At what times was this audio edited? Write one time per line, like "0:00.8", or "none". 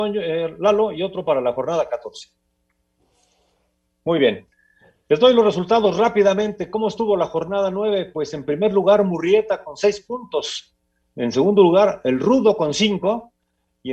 none